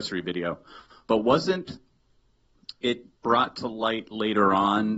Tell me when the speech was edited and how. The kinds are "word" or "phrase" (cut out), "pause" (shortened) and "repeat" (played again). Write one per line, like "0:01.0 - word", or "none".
0:03.2 - pause

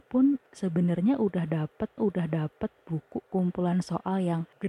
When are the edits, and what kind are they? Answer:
0:02.0 - repeat

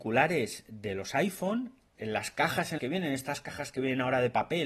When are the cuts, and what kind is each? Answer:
0:02.8 - word

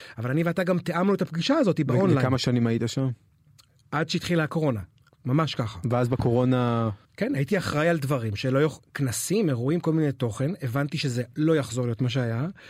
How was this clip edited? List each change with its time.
0:07.1 - pause

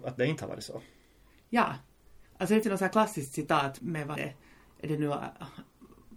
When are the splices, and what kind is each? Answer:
0:02.3 - pause
0:02.6 - word
0:03.8 - word
0:04.2 - word

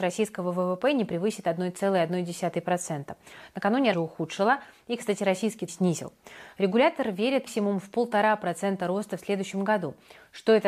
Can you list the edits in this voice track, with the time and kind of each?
0:03.9 - phrase
0:05.7 - phrase
0:07.5 - word

